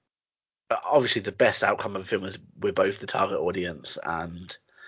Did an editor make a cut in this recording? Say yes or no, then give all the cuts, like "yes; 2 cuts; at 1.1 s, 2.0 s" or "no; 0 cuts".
no; 0 cuts